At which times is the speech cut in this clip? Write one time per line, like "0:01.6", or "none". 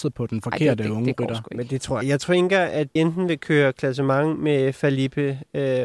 0:02.0
0:03.0